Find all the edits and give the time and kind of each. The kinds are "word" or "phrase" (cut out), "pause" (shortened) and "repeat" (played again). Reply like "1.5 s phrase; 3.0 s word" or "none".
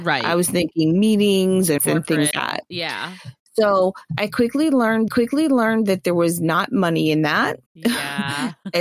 1.8 s word; 2.3 s word; 5.1 s repeat; 7.7 s pause